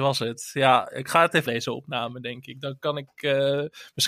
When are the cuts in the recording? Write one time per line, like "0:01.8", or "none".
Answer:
0:01.5